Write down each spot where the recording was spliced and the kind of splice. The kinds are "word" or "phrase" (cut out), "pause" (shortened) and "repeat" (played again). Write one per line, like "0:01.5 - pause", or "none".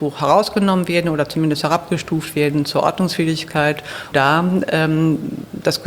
0:04.1 - word